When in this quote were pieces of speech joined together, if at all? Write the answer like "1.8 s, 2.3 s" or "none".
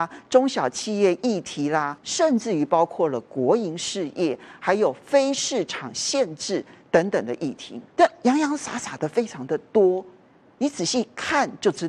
2.0 s, 7.9 s